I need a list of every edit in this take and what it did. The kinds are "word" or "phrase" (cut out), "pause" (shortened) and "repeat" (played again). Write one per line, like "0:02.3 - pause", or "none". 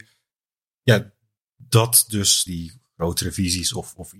0:02.5 - word